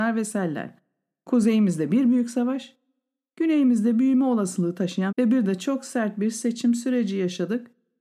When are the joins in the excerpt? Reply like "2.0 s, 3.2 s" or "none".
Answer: 5.1 s